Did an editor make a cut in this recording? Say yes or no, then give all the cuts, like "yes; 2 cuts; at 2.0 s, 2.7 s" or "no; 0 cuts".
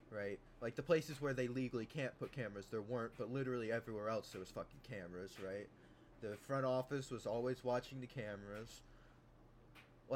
no; 0 cuts